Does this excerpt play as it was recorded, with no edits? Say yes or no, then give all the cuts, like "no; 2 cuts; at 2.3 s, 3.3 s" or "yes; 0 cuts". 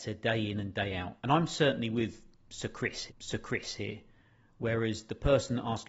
no; 2 cuts; at 1.2 s, 3.1 s